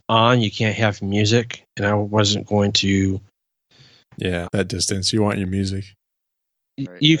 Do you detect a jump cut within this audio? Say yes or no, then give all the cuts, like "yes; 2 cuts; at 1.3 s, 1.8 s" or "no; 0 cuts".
yes; 1 cut; at 4.4 s